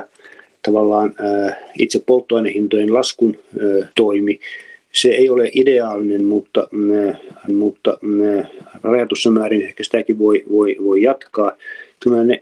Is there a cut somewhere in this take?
yes; 2 cuts; at 3.9 s, 7.5 s

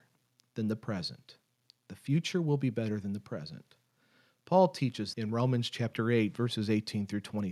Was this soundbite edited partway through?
yes; 1 cut; at 5.1 s

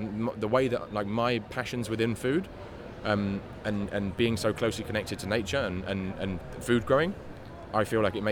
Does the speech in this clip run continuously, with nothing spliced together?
yes; 0 cuts

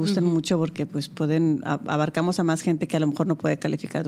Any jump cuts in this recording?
no; 0 cuts

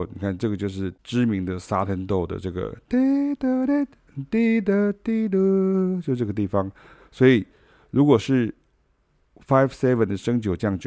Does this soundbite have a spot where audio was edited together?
no; 0 cuts

